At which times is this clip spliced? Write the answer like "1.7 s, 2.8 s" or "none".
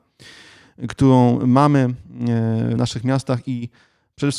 2.8 s